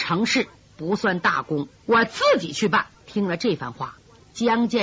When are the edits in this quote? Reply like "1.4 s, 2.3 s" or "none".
1.8 s, 3.0 s